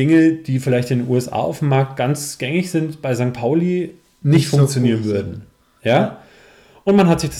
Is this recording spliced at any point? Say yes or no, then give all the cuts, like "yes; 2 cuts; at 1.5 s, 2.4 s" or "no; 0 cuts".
no; 0 cuts